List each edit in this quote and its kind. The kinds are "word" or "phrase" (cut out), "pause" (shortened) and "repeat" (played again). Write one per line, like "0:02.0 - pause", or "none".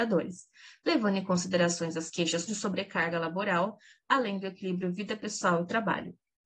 0:02.5 - word